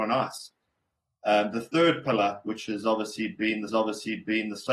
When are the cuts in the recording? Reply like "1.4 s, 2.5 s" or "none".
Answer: 3.7 s